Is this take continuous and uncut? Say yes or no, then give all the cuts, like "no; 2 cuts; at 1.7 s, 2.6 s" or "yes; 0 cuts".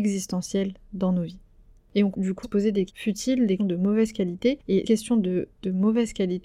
no; 5 cuts; at 2.1 s, 2.4 s, 2.9 s, 3.6 s, 4.8 s